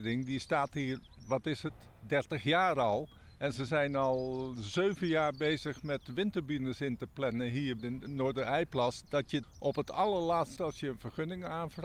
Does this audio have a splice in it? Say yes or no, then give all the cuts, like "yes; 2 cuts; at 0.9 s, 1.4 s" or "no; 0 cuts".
yes; 3 cuts; at 7.8 s, 9.4 s, 10.6 s